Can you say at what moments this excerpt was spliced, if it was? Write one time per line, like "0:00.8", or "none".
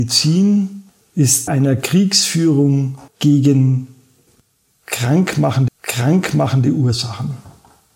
0:01.5
0:03.1
0:05.7